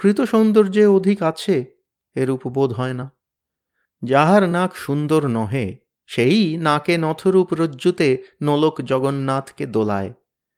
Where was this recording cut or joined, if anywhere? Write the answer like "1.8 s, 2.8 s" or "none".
none